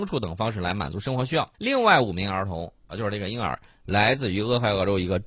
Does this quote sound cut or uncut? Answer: cut